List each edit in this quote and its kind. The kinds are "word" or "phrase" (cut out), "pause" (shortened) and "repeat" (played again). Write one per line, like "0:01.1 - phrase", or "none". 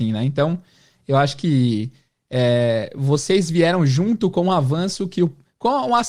none